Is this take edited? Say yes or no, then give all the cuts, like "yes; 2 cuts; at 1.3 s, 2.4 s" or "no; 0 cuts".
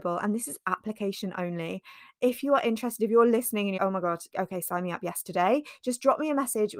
yes; 2 cuts; at 3.8 s, 4.3 s